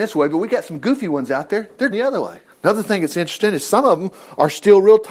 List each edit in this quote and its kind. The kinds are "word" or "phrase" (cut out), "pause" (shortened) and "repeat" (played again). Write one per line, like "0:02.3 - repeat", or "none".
0:01.9 - word